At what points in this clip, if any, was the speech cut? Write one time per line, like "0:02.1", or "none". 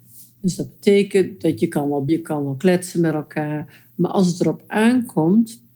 0:02.1